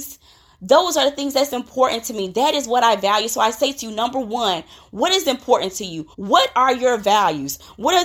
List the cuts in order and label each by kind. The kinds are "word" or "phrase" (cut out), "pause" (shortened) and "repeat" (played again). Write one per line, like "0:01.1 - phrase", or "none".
0:06.1 - pause